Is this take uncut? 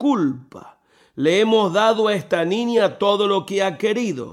yes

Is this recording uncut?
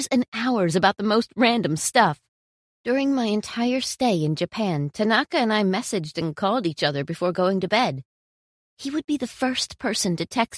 yes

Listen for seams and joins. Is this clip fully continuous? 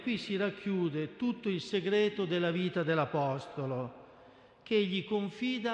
yes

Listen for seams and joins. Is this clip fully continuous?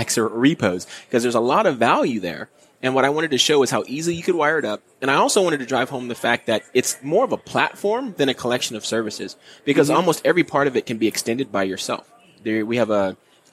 yes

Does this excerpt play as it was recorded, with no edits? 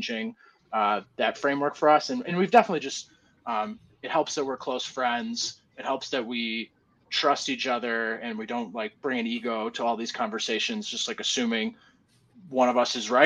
yes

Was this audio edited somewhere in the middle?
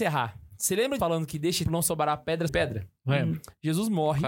yes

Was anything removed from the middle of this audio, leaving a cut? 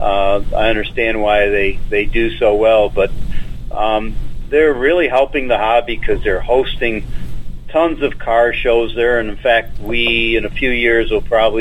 no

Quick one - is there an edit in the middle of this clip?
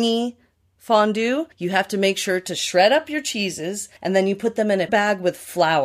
yes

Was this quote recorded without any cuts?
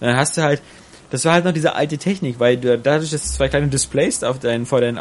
yes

